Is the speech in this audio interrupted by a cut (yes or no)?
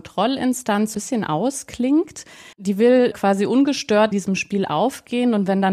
yes